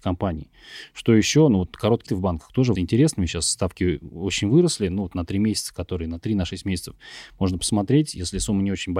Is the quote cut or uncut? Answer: cut